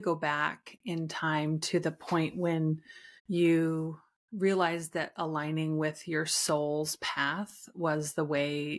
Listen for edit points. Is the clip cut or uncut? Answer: cut